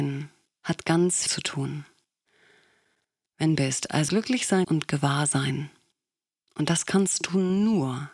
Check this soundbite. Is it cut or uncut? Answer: cut